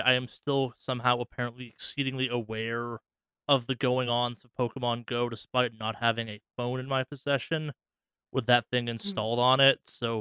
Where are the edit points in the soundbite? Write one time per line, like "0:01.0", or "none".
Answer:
none